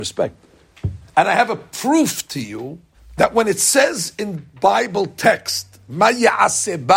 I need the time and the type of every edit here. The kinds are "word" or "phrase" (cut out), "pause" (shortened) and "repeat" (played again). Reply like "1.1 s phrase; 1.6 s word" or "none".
1.1 s pause; 2.9 s pause